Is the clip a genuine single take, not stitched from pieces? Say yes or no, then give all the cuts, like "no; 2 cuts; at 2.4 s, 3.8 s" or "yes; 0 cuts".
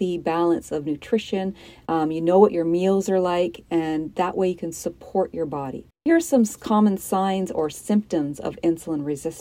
no; 1 cut; at 5.9 s